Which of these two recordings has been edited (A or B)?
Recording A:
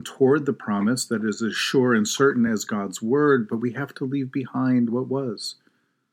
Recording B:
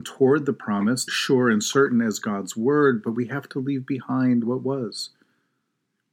B